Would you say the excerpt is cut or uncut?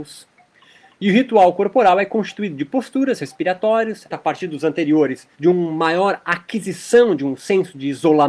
cut